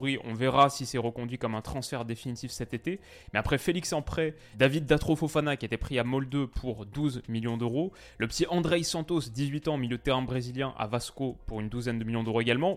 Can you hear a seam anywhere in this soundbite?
no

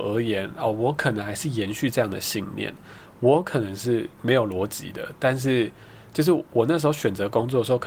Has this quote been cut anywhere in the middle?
yes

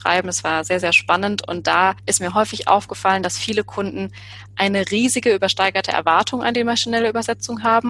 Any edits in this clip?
no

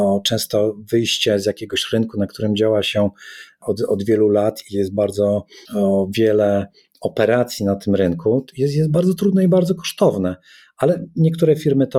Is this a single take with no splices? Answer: yes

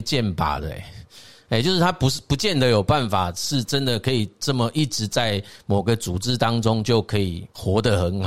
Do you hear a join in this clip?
no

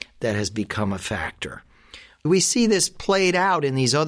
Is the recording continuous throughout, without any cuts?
yes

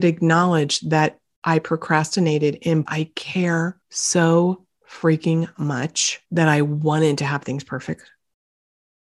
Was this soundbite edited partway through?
yes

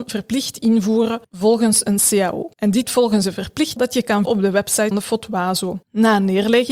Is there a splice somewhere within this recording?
yes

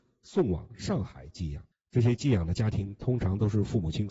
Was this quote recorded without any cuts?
no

